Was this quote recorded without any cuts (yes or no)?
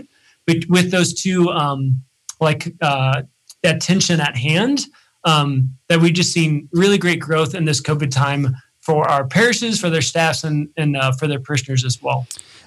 yes